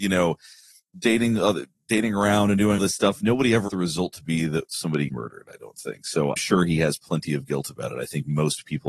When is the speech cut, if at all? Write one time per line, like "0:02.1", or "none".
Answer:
0:02.8
0:03.7
0:05.1
0:06.4